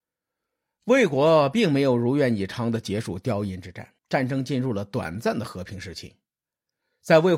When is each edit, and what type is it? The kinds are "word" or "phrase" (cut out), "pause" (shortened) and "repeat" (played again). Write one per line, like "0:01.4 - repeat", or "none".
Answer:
0:04.0 - pause